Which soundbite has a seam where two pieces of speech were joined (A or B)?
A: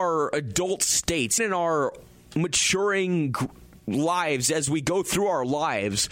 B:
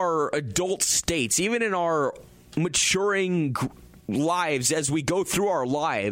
A